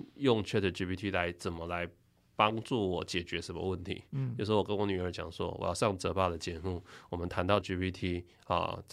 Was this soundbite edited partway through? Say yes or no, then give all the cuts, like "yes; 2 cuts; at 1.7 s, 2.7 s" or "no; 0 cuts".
yes; 1 cut; at 7.6 s